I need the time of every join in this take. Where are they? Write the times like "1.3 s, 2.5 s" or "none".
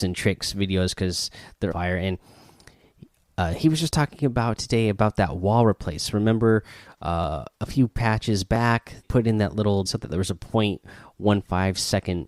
1.7 s, 9.0 s, 9.9 s